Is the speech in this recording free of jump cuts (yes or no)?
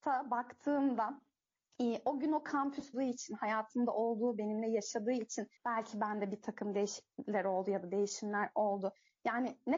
no